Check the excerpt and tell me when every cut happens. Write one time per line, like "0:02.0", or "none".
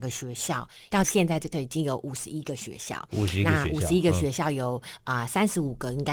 0:01.5